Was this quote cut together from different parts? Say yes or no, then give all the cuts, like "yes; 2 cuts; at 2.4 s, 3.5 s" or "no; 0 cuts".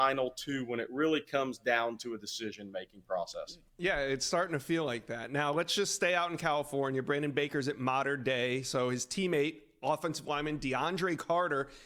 yes; 1 cut; at 3.7 s